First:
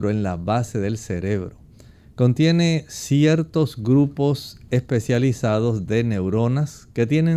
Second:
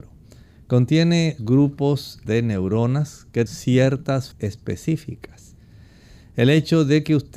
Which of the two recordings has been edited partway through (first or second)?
second